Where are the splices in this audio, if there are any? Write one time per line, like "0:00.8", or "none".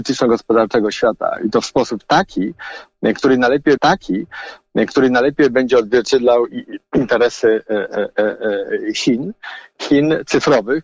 0:03.8